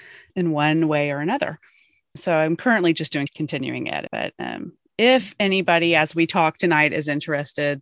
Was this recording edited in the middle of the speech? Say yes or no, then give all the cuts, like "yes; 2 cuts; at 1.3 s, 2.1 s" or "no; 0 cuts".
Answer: yes; 1 cut; at 2.2 s